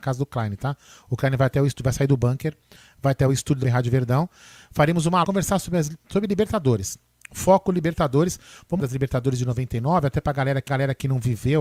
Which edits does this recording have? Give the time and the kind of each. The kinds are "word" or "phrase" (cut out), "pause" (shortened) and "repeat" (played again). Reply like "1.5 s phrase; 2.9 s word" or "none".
3.6 s word; 5.2 s phrase; 8.8 s word; 10.7 s repeat